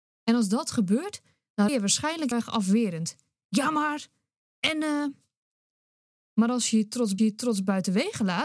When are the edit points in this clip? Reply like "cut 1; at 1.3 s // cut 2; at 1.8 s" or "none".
cut 1; at 1.7 s // cut 2; at 2.3 s // cut 3; at 7.2 s